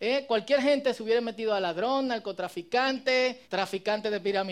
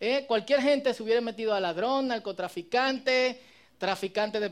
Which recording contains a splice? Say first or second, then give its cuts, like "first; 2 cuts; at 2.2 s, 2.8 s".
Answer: first; 1 cut; at 3.4 s